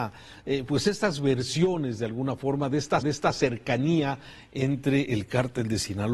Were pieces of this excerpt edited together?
yes; 1 cut; at 3.0 s

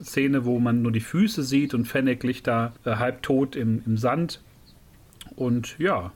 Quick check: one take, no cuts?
no; 1 cut; at 2.8 s

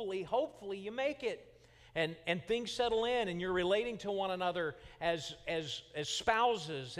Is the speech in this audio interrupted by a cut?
no; 0 cuts

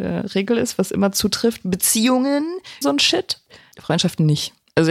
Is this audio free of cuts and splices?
no; 1 cut; at 2.8 s

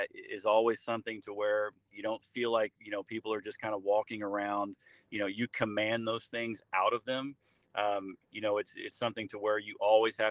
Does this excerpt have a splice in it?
no; 0 cuts

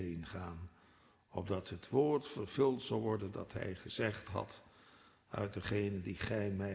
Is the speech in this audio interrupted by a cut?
no; 0 cuts

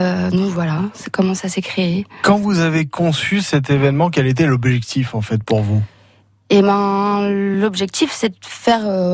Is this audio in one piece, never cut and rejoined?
yes; 0 cuts

